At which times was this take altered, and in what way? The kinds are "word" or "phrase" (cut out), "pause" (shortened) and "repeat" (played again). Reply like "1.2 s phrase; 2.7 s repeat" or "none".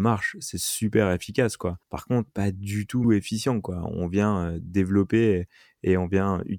1.8 s pause; 2.3 s word; 3.0 s phrase